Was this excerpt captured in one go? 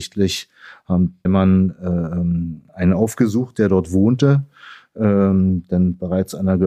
no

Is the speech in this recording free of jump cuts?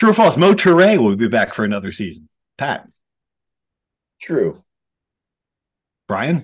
yes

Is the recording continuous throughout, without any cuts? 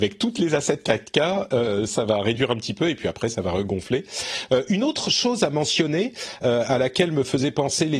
yes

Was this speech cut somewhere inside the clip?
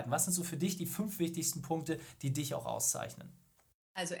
no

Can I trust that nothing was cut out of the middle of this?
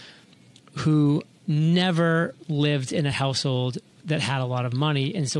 yes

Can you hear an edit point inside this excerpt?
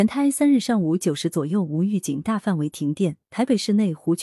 yes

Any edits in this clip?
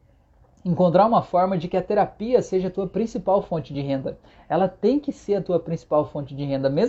no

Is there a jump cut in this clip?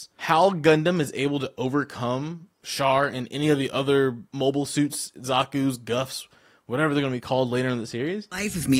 no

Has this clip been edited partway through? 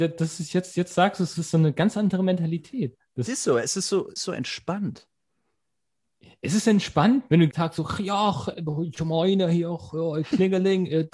yes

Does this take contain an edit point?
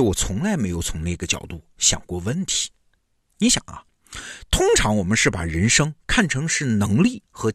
no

